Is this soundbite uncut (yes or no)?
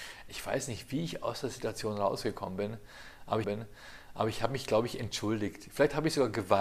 no